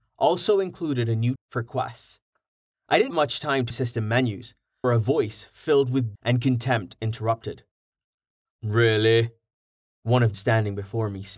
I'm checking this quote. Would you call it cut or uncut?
cut